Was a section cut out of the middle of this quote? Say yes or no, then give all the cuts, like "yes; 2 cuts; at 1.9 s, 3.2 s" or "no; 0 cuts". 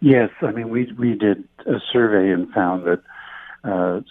yes; 1 cut; at 2.3 s